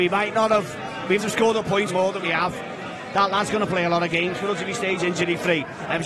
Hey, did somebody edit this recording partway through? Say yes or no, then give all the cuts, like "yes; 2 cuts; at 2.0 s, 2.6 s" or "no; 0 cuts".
yes; 3 cuts; at 1.2 s, 1.9 s, 2.2 s